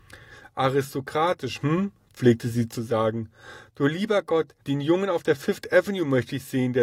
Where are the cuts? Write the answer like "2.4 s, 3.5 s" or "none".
4.6 s